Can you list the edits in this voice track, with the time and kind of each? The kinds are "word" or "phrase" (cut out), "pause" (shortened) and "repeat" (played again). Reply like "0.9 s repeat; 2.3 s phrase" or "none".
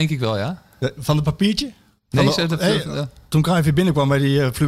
none